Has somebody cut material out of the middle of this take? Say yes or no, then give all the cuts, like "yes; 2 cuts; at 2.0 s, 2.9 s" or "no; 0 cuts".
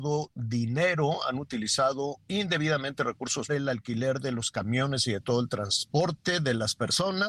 yes; 1 cut; at 3.5 s